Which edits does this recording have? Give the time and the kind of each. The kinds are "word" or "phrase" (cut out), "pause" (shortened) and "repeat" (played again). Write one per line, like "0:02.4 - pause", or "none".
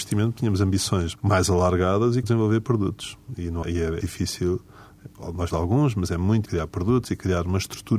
0:01.2 - word
0:02.2 - word
0:03.6 - word
0:04.0 - word
0:05.5 - word
0:06.5 - word